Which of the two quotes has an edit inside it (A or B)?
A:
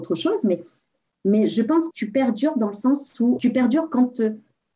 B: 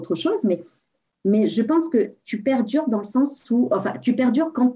A